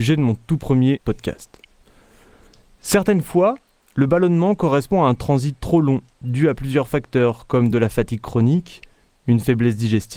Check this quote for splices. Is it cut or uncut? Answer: uncut